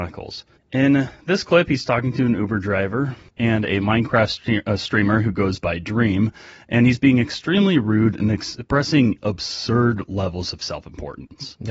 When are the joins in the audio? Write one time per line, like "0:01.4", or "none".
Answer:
none